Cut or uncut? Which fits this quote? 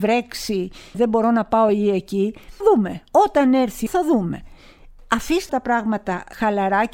cut